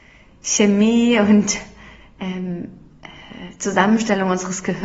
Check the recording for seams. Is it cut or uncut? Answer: uncut